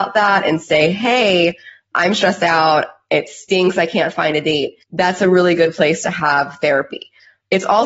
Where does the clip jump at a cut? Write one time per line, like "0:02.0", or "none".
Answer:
0:04.8